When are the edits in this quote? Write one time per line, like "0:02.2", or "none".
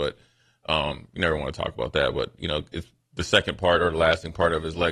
none